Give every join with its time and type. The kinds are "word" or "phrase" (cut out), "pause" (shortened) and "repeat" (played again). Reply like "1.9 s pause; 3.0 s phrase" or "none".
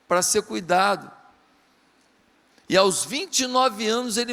none